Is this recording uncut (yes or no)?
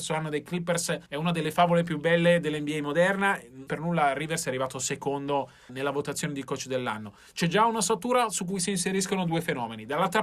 no